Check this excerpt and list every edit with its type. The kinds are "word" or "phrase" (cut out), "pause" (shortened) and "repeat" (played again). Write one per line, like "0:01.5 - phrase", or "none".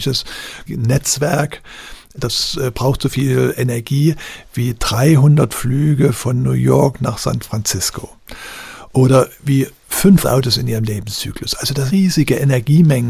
0:11.9 - word